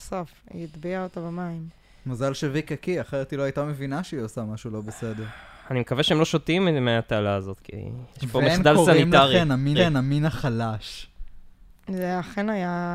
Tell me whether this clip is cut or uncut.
cut